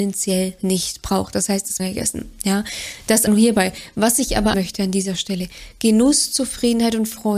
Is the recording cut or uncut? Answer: cut